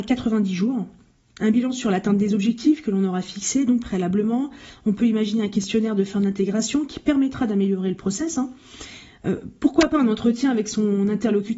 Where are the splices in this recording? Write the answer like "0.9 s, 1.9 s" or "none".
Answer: none